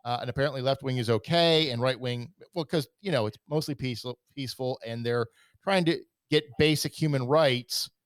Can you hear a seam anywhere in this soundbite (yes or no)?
no